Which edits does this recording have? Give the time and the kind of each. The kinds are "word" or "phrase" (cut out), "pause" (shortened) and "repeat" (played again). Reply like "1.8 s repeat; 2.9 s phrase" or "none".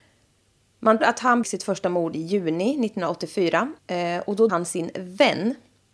1.0 s word; 1.4 s word; 3.8 s pause; 4.5 s word